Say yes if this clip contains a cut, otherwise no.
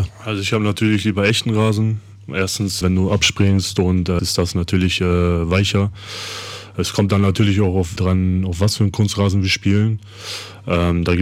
yes